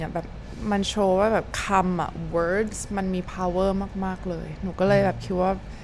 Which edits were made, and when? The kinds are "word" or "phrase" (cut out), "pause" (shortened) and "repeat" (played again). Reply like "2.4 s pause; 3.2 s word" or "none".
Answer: none